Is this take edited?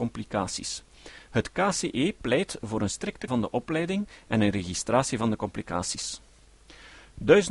yes; 1 cut; at 3.3 s

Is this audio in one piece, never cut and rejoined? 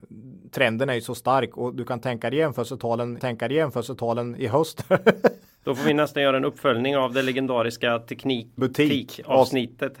no; 2 cuts; at 3.2 s, 8.6 s

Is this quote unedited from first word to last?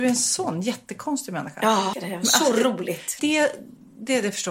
no; 2 cuts; at 1.9 s, 3.2 s

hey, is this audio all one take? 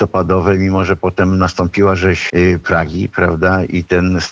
no; 1 cut; at 2.3 s

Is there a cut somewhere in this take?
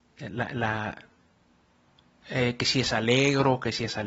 no; 0 cuts

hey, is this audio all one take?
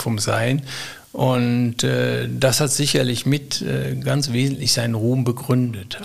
yes; 0 cuts

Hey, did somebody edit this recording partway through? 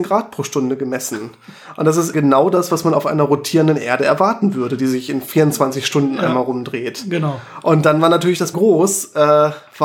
yes; 2 cuts; at 2.1 s, 8.5 s

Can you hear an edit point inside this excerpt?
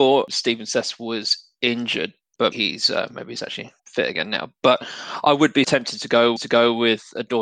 yes; 4 cuts; at 2.5 s, 3.8 s, 5.6 s, 6.4 s

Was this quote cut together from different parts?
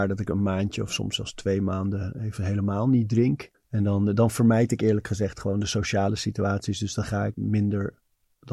yes; 2 cuts; at 3.5 s, 7.3 s

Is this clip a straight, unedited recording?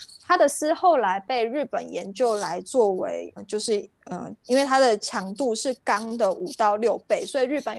no; 1 cut; at 3.4 s

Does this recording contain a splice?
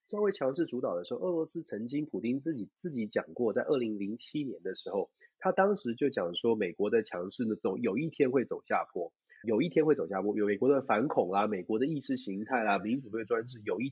yes; 1 cut; at 9.4 s

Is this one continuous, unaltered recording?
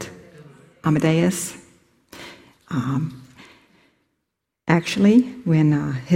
yes; 0 cuts

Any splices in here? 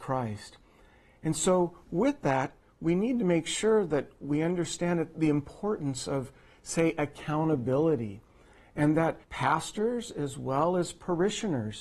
yes; 1 cut; at 9.2 s

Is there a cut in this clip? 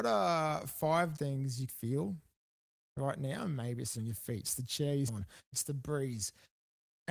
yes; 6 cuts; at 1.2 s, 1.7 s, 3.9 s, 4.4 s, 5.1 s, 5.5 s

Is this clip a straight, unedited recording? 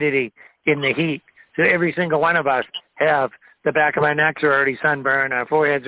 yes; 0 cuts

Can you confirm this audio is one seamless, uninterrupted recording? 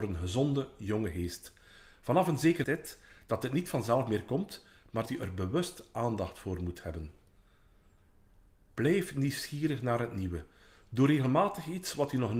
no; 2 cuts; at 2.6 s, 5.1 s

